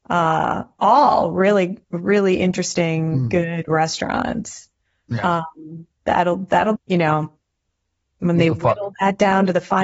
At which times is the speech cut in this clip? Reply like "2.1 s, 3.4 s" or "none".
1.8 s, 6.8 s